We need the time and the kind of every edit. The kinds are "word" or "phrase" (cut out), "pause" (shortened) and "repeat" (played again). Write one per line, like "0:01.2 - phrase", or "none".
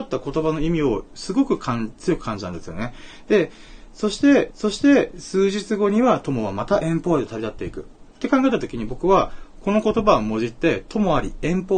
0:04.5 - repeat